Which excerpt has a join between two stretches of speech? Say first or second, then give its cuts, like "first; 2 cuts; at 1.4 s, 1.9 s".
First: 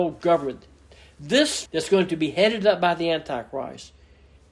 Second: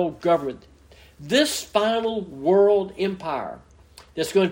first; 1 cut; at 1.7 s